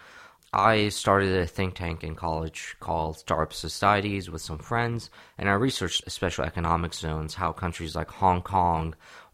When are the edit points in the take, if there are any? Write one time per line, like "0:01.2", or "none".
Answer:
0:06.0